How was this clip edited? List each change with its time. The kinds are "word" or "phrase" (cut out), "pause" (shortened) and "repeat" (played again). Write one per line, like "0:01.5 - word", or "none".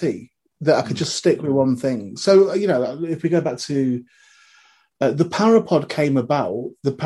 none